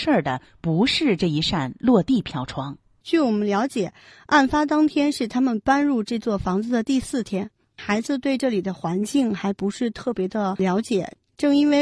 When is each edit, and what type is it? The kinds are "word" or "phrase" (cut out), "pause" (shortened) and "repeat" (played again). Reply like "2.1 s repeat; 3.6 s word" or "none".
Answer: none